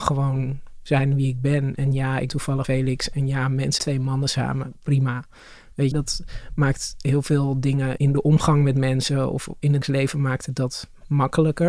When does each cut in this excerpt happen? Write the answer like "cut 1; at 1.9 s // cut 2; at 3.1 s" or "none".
cut 1; at 2.3 s // cut 2; at 2.6 s // cut 3; at 3.8 s // cut 4; at 5.9 s // cut 5; at 8.0 s // cut 6; at 9.8 s